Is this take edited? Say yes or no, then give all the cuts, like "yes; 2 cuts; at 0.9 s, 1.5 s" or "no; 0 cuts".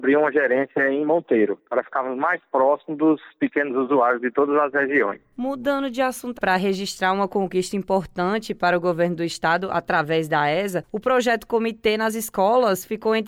yes; 1 cut; at 6.3 s